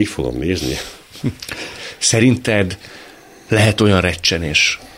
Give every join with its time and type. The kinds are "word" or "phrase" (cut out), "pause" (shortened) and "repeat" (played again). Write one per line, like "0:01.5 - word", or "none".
none